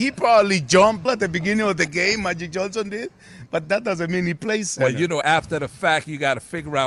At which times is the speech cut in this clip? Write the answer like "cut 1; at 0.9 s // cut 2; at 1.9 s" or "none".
cut 1; at 1.1 s // cut 2; at 3.6 s // cut 3; at 5.2 s